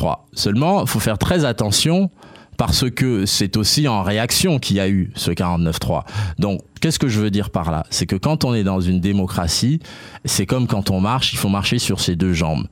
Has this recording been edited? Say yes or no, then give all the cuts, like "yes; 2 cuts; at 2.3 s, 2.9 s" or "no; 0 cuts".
no; 0 cuts